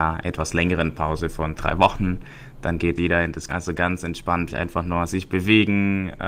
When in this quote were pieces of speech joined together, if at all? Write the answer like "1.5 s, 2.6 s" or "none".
1.6 s, 3.0 s, 3.5 s, 4.5 s